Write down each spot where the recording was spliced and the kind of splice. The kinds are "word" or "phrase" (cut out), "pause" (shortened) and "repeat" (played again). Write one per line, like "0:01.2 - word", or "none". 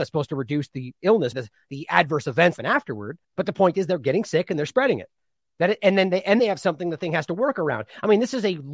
0:01.3 - phrase
0:02.6 - word
0:03.2 - pause
0:04.7 - word
0:06.4 - word